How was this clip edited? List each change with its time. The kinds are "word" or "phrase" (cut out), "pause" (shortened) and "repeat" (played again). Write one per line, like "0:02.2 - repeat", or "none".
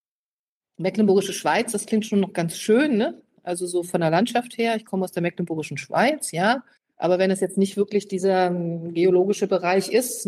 0:06.8 - pause